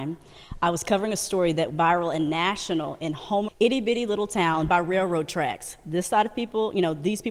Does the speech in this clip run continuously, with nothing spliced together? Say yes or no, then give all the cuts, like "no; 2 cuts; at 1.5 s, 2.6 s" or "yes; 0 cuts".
no; 3 cuts; at 1.7 s, 3.5 s, 4.7 s